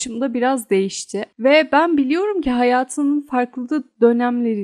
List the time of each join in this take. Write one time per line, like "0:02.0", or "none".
0:01.3